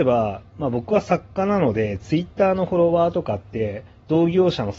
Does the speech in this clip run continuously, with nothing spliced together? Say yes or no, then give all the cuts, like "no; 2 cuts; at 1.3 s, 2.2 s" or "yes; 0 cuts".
yes; 0 cuts